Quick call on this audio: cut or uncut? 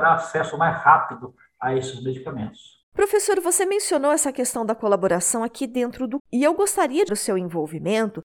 cut